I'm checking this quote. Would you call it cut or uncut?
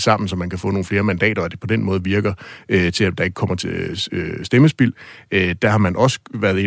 uncut